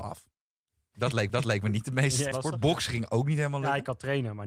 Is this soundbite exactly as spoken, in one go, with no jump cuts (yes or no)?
no